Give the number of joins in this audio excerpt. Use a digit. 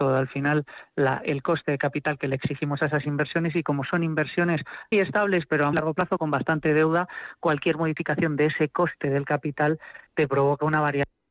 3